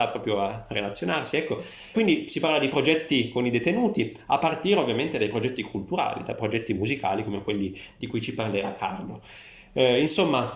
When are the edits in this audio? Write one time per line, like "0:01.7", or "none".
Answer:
0:01.9